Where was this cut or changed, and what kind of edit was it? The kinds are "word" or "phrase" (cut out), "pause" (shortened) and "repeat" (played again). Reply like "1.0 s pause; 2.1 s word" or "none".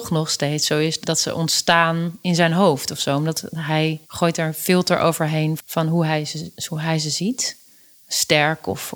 1.0 s word; 4.0 s pause; 5.6 s word

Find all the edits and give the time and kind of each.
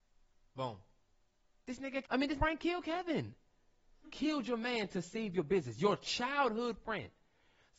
2.0 s word; 2.4 s word; 4.0 s word

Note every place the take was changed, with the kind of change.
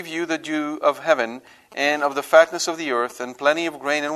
none

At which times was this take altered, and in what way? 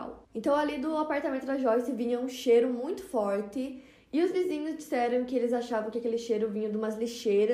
none

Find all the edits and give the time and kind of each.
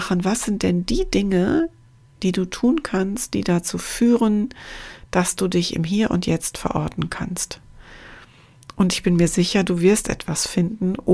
none

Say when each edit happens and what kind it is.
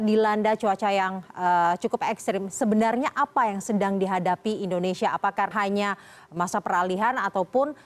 5.5 s word

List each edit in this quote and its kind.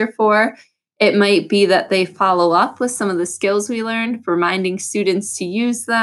none

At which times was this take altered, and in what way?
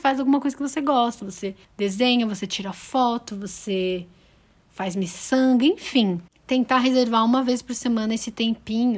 1.6 s pause

